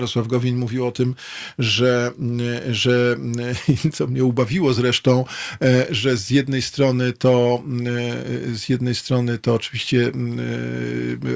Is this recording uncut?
yes; 0 cuts

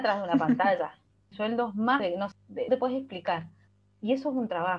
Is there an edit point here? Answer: yes; 4 cuts; at 1.3 s, 2.0 s, 2.3 s, 2.7 s

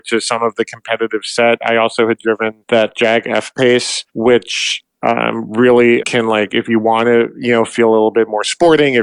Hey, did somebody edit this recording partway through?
yes; 2 cuts; at 4.1 s, 6.0 s

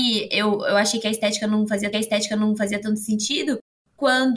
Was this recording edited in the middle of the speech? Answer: yes; 1 cut; at 1.9 s

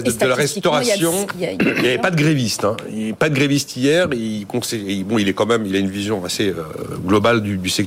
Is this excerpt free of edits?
yes; 0 cuts

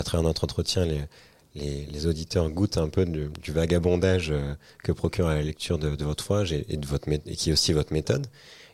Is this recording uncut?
yes; 0 cuts

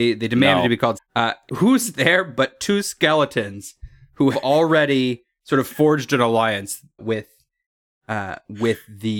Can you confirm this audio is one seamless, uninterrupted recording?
no; 4 cuts; at 0.9 s, 1.5 s, 4.3 s, 7.0 s

